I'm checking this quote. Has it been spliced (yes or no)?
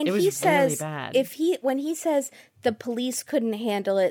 no